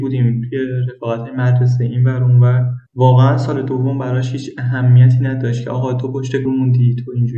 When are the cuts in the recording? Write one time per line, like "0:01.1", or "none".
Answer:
0:02.9
0:06.4